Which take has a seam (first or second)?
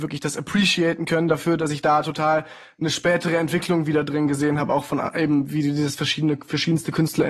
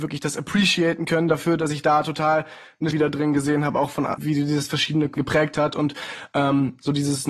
second